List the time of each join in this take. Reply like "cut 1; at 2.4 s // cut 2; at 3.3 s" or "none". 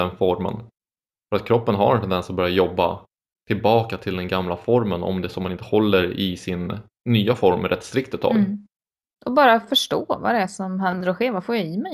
none